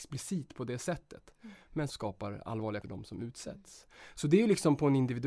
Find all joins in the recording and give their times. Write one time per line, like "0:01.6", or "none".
0:01.9
0:02.8